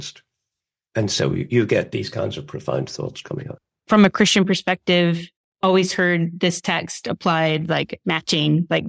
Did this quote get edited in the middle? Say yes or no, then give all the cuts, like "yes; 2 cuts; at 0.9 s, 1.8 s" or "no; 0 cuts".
no; 0 cuts